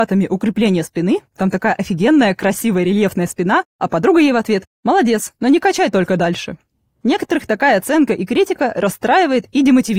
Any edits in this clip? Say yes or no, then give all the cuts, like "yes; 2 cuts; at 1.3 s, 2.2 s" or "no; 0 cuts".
no; 0 cuts